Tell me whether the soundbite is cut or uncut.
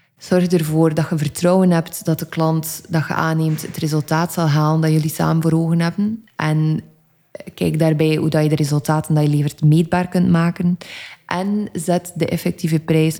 uncut